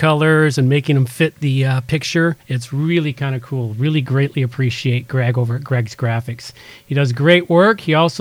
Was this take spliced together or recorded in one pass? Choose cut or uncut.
cut